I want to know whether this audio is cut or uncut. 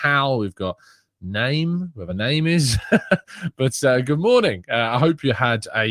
uncut